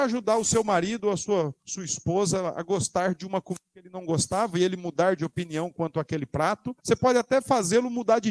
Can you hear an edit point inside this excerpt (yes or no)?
yes